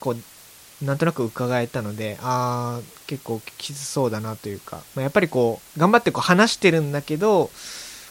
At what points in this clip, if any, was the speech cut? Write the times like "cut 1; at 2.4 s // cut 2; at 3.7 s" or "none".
cut 1; at 4.9 s // cut 2; at 5.7 s